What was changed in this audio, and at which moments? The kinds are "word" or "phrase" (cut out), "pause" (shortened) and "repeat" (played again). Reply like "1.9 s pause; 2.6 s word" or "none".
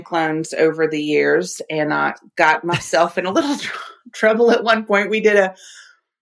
none